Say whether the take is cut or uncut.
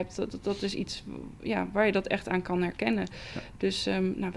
cut